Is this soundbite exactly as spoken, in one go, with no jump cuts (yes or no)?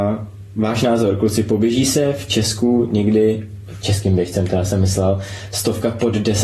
yes